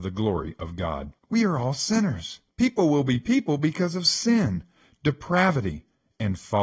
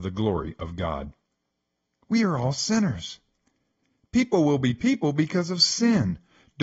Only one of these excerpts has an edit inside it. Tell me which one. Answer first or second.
first